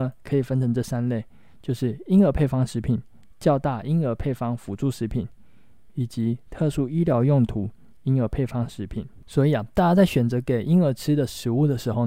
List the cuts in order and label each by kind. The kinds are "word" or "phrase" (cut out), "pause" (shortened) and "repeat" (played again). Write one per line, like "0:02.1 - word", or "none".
none

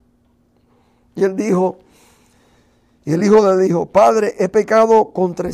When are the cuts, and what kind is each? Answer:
none

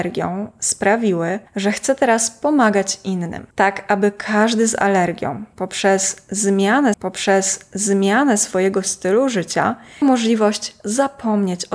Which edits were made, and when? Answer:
0:01.5 - pause
0:03.5 - pause
0:06.9 - repeat
0:10.0 - word

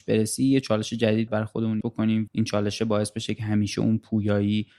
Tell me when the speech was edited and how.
0:01.3 - word
0:01.8 - word
0:02.3 - word

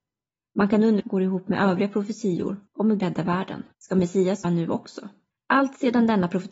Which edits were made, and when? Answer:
0:01.0 - phrase
0:02.7 - pause
0:03.0 - phrase
0:03.7 - pause
0:04.4 - word
0:05.3 - pause

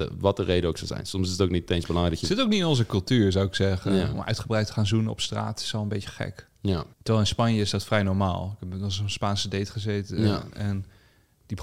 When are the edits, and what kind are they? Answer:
0:06.9 - pause

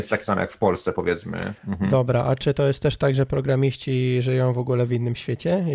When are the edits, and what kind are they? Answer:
0:01.6 - pause

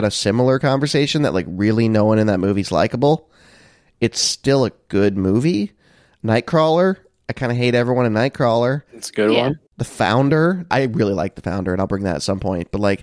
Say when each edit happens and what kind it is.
0:08.9 - pause

